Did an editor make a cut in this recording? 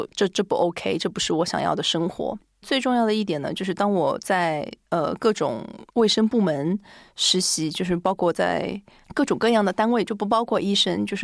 yes; 1 cut; at 5.9 s

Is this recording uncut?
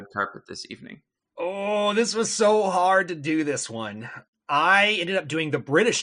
no; 1 cut; at 4.3 s

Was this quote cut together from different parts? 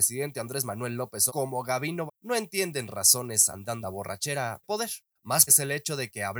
yes; 5 cuts; at 1.3 s, 2.1 s, 3.8 s, 4.6 s, 5.5 s

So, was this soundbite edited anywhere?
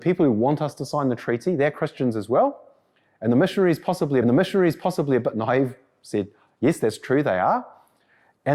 yes; 1 cut; at 4.2 s

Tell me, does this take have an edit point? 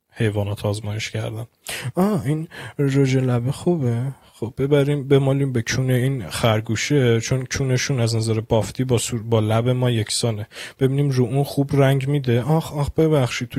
no; 0 cuts

